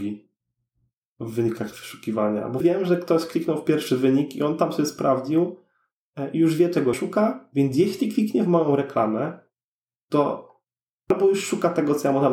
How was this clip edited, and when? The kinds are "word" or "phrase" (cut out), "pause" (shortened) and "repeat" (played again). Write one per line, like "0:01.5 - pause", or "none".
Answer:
0:02.6 - word
0:06.9 - word

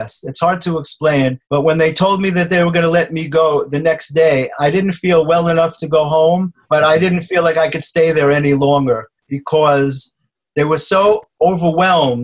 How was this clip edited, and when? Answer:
0:01.4 - pause
0:06.6 - pause
0:09.2 - pause

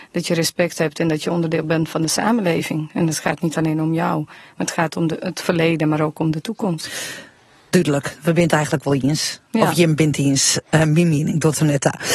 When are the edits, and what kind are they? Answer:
none

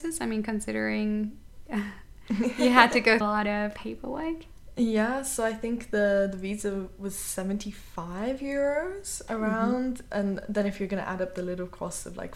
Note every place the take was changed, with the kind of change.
0:03.2 - phrase
0:03.8 - word

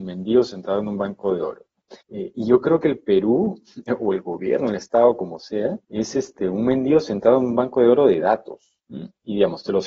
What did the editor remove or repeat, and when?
0:02.0 - pause
0:05.8 - pause
0:08.8 - pause

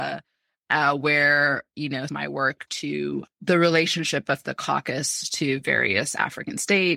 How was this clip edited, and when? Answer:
0:02.1 - phrase
0:02.7 - word

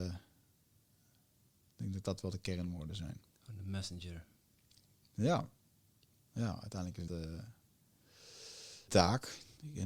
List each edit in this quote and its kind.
0:07.1 - word
0:08.9 - word

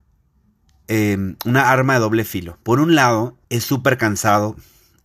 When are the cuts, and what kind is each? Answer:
0:02.6 - pause
0:03.4 - pause

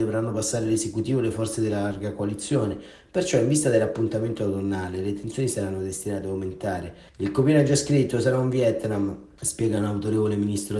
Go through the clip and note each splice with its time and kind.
0:07.1 - pause

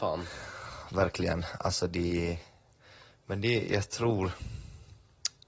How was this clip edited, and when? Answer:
none

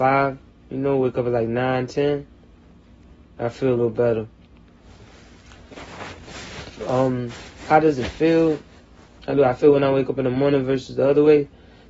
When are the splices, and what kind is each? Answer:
none

